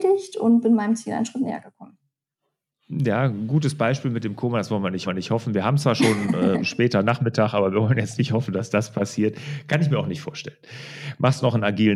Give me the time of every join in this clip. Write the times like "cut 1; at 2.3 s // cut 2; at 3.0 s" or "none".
cut 1; at 5.0 s